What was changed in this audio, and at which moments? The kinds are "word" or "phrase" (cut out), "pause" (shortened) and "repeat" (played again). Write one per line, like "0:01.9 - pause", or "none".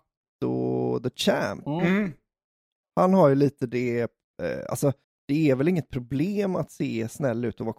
0:05.0 - pause